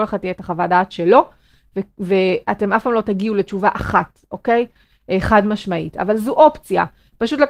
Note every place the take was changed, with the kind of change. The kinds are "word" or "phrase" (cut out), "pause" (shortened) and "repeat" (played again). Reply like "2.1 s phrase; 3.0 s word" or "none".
none